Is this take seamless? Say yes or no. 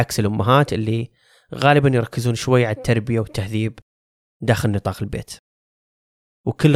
yes